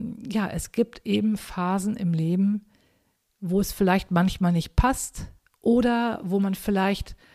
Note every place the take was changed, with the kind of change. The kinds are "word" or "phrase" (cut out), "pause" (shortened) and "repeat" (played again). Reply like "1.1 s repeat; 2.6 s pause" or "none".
none